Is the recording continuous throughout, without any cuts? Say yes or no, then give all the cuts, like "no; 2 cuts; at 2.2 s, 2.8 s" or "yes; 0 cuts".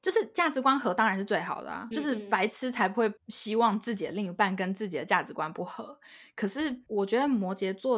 no; 2 cuts; at 1.9 s, 3.2 s